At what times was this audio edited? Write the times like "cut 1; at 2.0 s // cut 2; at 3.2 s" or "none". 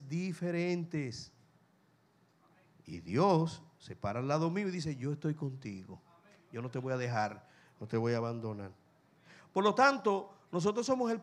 none